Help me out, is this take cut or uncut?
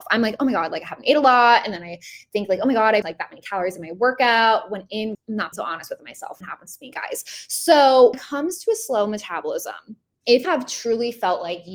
cut